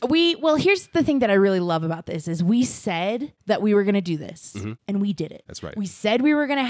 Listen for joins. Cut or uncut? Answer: uncut